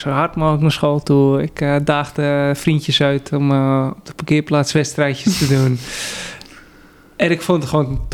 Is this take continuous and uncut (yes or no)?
yes